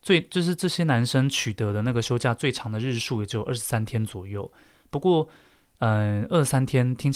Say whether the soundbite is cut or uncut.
uncut